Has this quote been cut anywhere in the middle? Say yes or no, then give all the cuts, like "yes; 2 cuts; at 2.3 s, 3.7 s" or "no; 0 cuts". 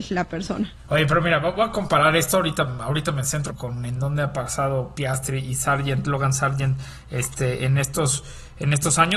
yes; 1 cut; at 3.5 s